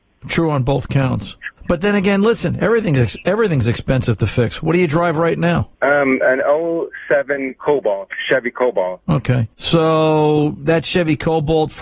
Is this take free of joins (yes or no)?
no